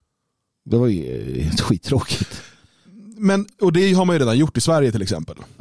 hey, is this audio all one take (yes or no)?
yes